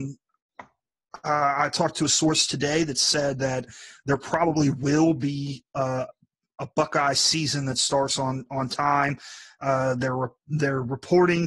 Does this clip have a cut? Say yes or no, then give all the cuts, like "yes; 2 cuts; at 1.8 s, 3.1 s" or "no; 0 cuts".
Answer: no; 0 cuts